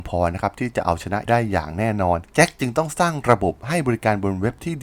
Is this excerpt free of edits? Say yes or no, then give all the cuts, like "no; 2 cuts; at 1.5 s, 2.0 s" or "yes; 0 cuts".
no; 1 cut; at 1.3 s